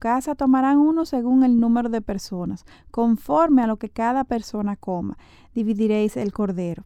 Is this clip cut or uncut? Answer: uncut